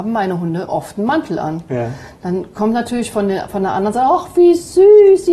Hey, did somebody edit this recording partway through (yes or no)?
no